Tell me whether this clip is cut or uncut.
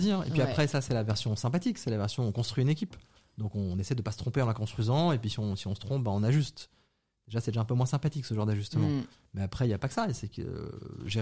uncut